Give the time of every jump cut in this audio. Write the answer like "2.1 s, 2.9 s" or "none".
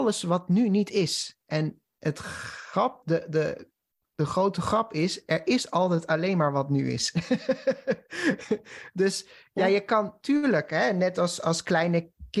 none